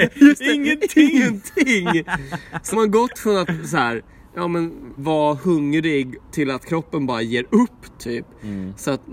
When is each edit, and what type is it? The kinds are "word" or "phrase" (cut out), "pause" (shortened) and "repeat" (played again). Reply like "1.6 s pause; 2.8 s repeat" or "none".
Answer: 2.7 s word; 5.0 s word